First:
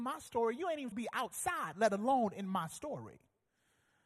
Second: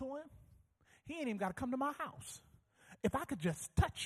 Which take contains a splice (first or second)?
first